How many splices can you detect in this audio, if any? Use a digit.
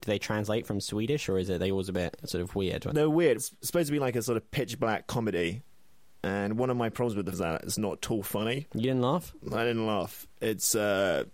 3